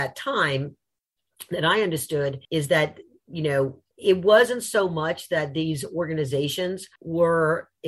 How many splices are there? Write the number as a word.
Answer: three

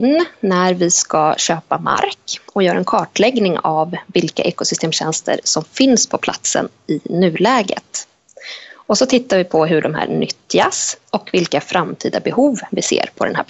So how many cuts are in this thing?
one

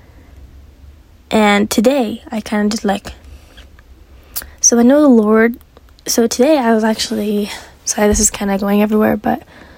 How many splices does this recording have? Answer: zero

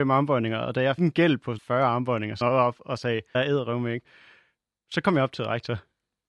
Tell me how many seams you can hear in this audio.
four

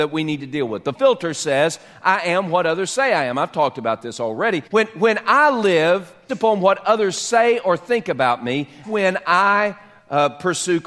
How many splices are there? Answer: four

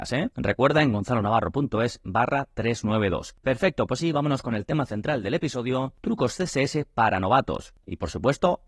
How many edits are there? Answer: one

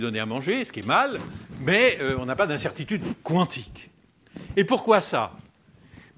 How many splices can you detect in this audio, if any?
zero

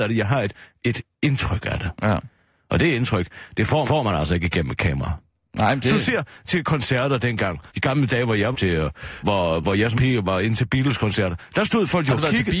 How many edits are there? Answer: six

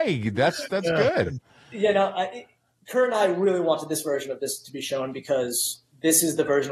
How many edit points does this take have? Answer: zero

